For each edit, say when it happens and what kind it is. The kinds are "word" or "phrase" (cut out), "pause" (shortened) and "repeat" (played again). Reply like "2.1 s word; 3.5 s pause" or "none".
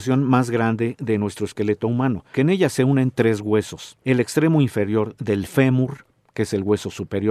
2.3 s word; 4.0 s pause

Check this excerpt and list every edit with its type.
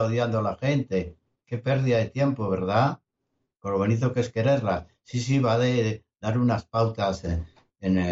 none

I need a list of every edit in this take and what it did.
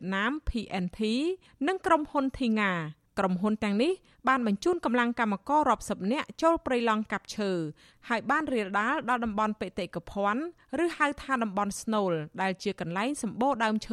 none

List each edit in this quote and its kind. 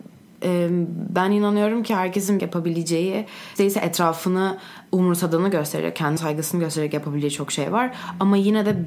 2.4 s phrase; 3.6 s word; 6.2 s word

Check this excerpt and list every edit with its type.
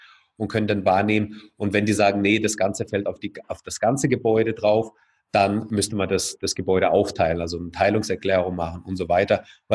none

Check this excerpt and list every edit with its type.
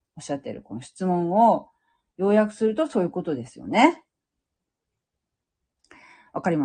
none

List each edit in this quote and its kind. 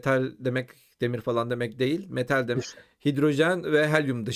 2.5 s word

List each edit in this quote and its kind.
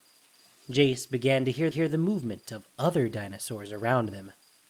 1.7 s repeat

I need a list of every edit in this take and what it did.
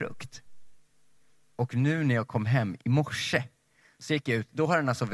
none

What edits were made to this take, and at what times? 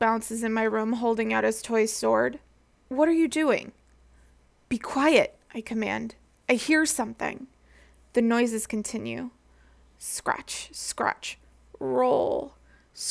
none

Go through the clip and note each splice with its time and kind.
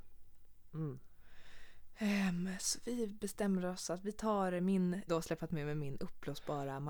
5.1 s phrase

